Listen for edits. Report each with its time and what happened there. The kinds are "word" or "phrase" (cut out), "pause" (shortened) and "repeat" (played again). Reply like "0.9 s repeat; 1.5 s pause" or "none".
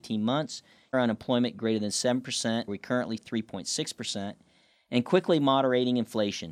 0.9 s phrase; 2.7 s word; 3.2 s word